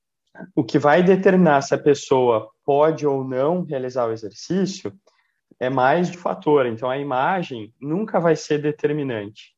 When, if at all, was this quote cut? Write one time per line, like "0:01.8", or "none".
0:06.1